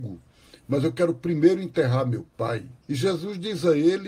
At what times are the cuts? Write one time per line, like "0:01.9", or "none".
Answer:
0:02.8